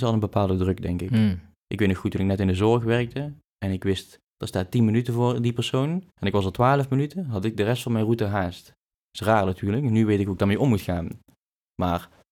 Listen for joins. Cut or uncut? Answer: cut